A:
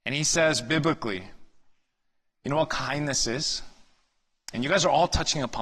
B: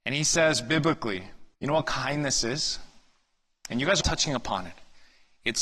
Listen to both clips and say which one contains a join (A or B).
B